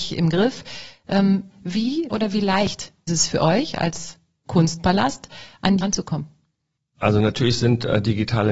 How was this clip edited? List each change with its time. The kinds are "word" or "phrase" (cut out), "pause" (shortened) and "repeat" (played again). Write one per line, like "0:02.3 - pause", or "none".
0:02.1 - word
0:03.1 - word
0:04.4 - word
0:05.8 - word